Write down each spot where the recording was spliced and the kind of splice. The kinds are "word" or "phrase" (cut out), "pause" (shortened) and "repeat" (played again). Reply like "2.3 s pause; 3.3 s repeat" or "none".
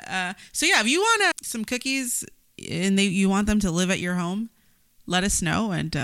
1.3 s word